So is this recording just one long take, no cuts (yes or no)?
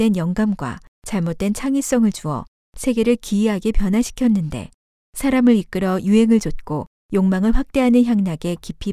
yes